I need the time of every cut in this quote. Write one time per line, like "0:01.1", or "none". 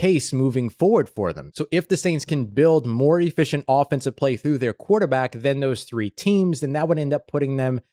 none